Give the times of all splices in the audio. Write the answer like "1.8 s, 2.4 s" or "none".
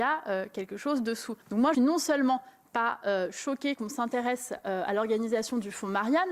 1.4 s, 1.7 s